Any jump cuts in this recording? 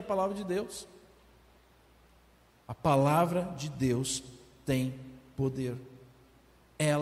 no; 0 cuts

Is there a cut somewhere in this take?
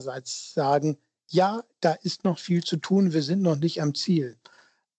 no; 0 cuts

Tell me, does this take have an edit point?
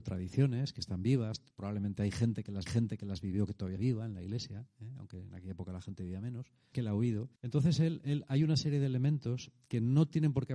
yes; 5 cuts; at 1.5 s, 2.7 s, 3.8 s, 6.7 s, 7.4 s

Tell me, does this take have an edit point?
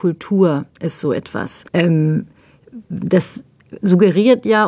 yes; 1 cut; at 1.7 s

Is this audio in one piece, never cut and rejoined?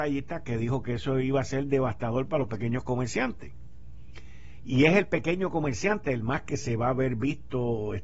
yes; 0 cuts

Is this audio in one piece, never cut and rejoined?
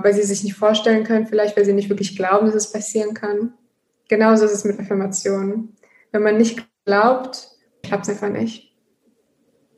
no; 1 cut; at 7.8 s

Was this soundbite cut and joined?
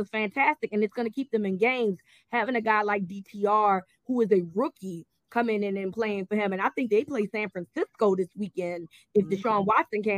no; 0 cuts

